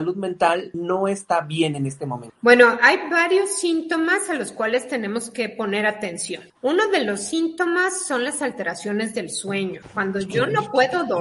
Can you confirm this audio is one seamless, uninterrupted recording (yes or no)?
yes